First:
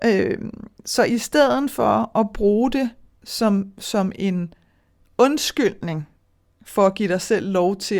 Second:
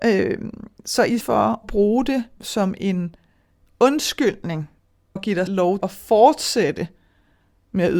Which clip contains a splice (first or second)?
second